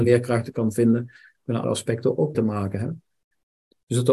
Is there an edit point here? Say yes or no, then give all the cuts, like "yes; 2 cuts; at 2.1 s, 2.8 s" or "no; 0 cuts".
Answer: yes; 2 cuts; at 1.6 s, 2.3 s